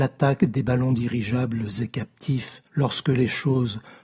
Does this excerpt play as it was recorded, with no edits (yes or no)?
no